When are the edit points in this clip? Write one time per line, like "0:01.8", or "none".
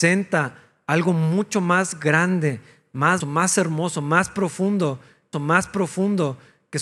0:03.2
0:05.3